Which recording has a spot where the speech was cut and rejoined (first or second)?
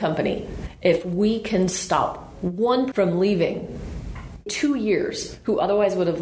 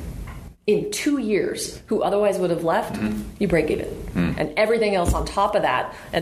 first